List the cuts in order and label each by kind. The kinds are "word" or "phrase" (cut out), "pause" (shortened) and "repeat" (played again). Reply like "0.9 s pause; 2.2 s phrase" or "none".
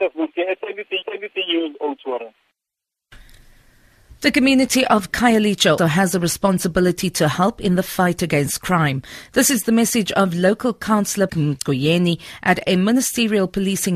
1.0 s repeat; 4.2 s pause; 5.8 s word; 11.3 s word